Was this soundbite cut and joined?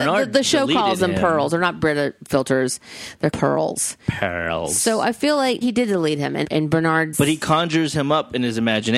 yes; 4 cuts; at 3.3 s, 5.6 s, 6.4 s, 7.1 s

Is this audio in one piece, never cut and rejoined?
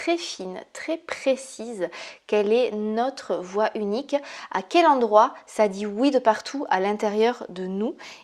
yes; 0 cuts

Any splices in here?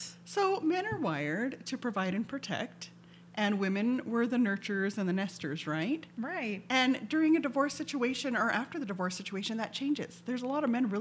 no; 0 cuts

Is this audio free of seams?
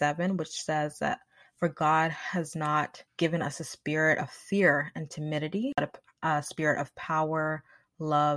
no; 1 cut; at 3.1 s

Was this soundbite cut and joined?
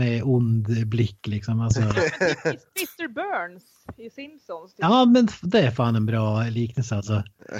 no; 0 cuts

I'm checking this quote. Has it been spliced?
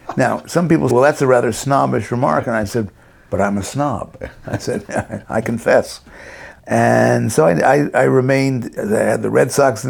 yes; 2 cuts; at 0.9 s, 8.8 s

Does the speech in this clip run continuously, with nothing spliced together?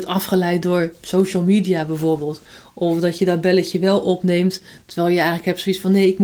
yes; 0 cuts

